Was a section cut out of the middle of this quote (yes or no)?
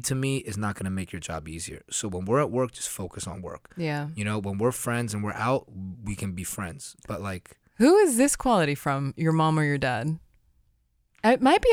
no